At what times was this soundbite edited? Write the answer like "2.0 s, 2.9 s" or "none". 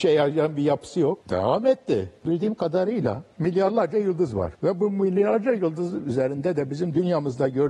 1.2 s, 2.2 s, 4.5 s